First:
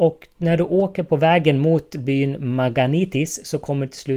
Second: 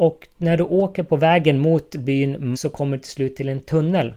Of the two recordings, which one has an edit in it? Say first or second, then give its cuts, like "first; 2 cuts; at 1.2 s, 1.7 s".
second; 1 cut; at 2.5 s